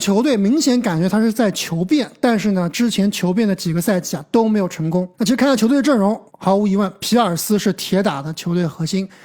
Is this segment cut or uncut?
cut